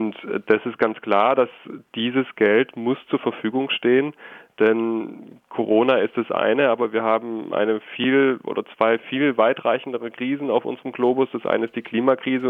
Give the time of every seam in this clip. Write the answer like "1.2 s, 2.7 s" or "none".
none